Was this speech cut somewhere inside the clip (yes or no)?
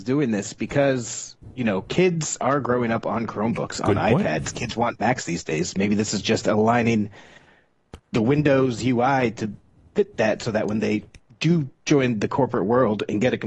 no